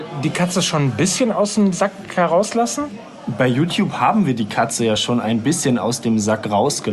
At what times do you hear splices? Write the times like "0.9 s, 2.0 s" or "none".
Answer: none